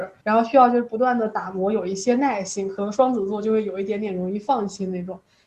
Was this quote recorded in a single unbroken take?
yes; 0 cuts

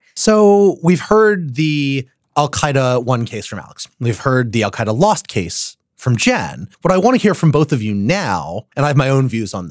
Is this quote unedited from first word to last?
no; 2 cuts; at 6.7 s, 8.7 s

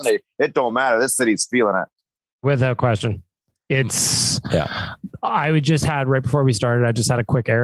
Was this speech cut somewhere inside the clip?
no; 0 cuts

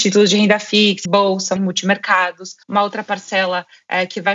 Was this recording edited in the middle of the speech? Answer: yes; 3 cuts; at 1.0 s, 1.6 s, 2.6 s

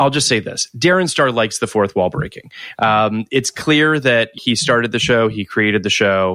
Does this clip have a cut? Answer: yes; 1 cut; at 4.4 s

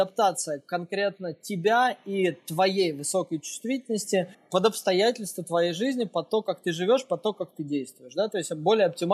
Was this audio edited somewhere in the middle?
yes; 1 cut; at 4.3 s

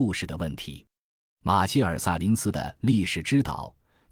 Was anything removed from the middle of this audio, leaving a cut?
no; 0 cuts

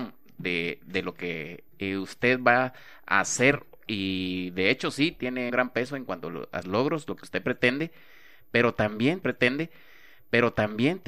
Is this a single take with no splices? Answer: no; 4 cuts; at 1.7 s, 5.5 s, 6.6 s, 9.2 s

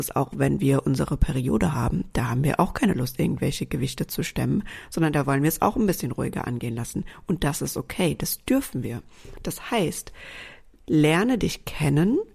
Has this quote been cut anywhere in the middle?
no; 0 cuts

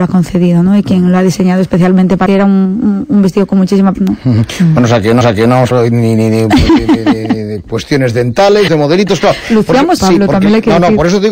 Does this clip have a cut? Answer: yes; 6 cuts; at 2.3 s, 3.9 s, 5.2 s, 5.7 s, 8.7 s, 10.0 s

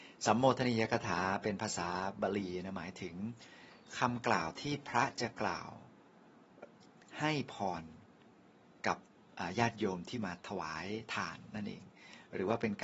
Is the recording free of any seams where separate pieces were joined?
yes; 0 cuts

